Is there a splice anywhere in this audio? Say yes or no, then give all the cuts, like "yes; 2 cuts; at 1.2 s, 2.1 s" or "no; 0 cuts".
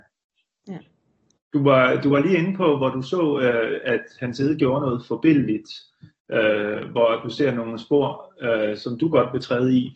no; 0 cuts